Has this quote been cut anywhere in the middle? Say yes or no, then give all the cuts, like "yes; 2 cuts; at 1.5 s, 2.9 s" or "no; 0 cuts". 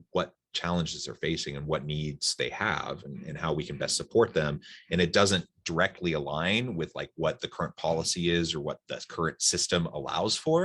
no; 0 cuts